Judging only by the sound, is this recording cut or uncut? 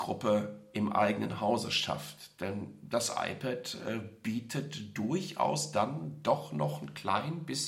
uncut